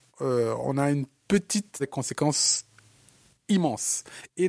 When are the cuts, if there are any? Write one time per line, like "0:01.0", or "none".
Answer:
0:01.8